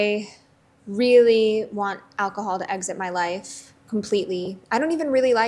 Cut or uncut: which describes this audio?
uncut